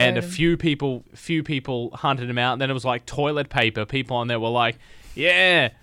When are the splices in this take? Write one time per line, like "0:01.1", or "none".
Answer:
0:01.1